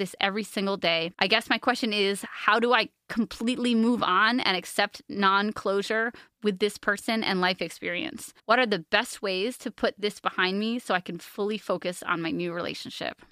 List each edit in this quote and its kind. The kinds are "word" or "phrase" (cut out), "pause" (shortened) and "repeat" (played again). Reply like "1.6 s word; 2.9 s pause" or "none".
1.1 s pause; 8.4 s pause